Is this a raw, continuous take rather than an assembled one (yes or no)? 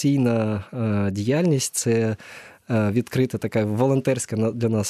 yes